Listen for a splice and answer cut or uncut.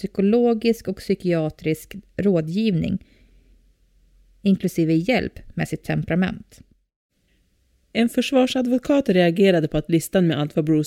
uncut